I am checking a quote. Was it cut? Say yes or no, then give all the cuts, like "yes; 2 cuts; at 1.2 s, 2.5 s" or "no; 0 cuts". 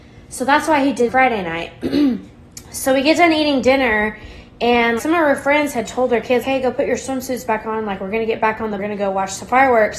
yes; 5 cuts; at 1.1 s, 2.3 s, 5.0 s, 6.4 s, 8.8 s